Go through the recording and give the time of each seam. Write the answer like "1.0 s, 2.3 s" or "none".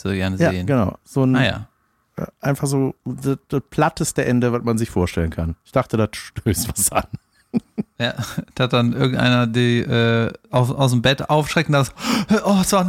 1.0 s, 3.0 s, 5.6 s